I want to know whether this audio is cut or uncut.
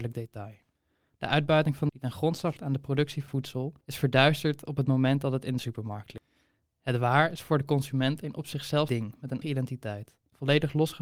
cut